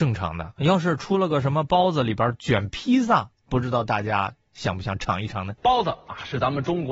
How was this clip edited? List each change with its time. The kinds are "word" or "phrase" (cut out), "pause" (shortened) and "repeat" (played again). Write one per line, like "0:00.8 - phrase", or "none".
0:05.6 - pause